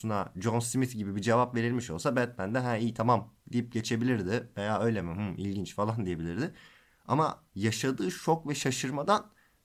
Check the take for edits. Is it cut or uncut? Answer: cut